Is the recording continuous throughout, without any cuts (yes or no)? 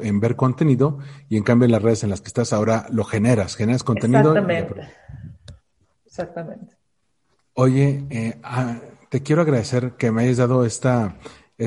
yes